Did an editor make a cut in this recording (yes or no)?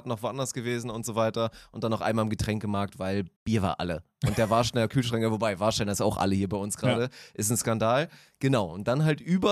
yes